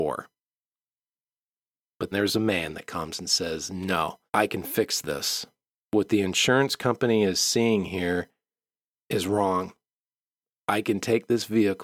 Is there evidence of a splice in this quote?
yes; 3 cuts; at 2.1 s, 4.3 s, 5.7 s

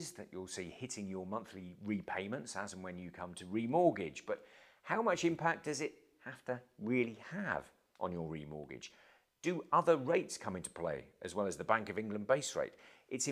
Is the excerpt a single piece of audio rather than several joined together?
yes; 0 cuts

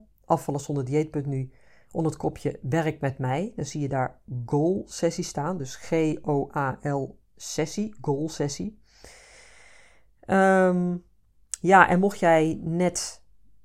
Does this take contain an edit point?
no; 0 cuts

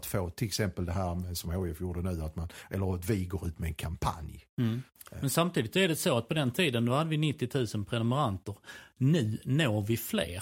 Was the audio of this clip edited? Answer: no; 0 cuts

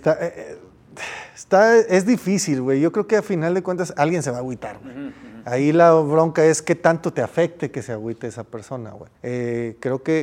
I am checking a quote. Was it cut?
yes; 1 cut; at 9.2 s

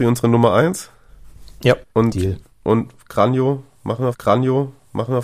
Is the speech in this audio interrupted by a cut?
yes; 2 cuts; at 1.9 s, 4.1 s

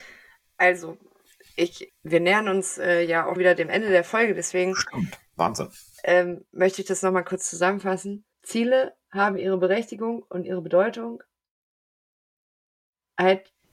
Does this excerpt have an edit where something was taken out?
yes; 4 cuts; at 1.9 s, 3.4 s, 6.5 s, 8.3 s

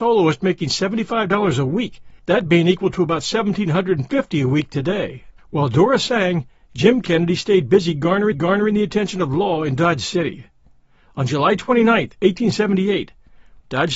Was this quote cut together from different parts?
yes; 3 cuts; at 2.2 s, 5.4 s, 8.3 s

